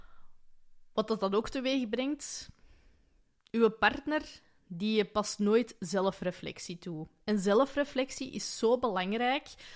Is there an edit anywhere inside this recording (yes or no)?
no